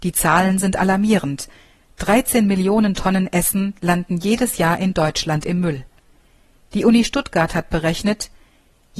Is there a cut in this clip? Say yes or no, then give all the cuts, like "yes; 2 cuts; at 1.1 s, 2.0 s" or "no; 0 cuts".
no; 0 cuts